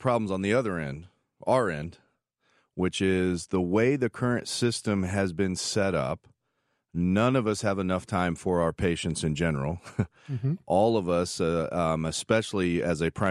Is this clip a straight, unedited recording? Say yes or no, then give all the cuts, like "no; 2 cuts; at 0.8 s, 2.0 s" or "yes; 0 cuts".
yes; 0 cuts